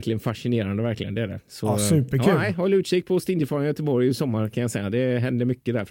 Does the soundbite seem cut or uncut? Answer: uncut